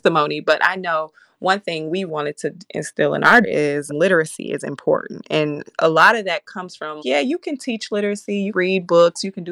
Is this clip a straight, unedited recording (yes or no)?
no